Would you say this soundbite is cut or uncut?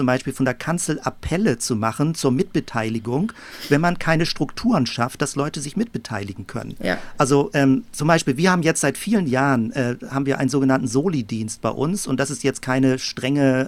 uncut